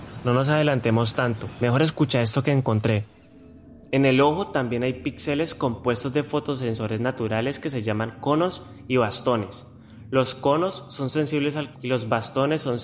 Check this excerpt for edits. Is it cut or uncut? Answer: cut